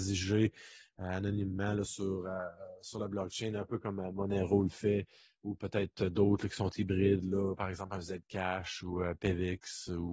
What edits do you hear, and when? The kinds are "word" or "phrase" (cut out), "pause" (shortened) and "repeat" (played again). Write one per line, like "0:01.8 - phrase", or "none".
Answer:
none